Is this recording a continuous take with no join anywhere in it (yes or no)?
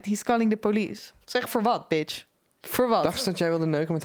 no